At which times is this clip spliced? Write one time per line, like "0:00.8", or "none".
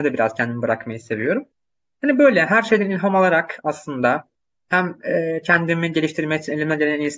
none